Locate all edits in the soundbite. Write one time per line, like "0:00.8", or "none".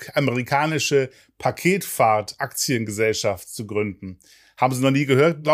none